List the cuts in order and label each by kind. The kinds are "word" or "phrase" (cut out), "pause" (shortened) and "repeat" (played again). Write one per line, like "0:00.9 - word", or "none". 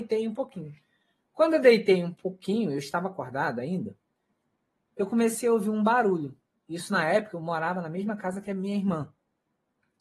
none